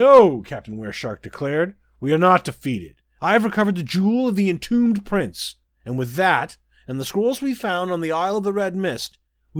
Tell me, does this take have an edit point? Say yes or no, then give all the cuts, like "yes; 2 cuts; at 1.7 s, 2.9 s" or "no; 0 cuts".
no; 0 cuts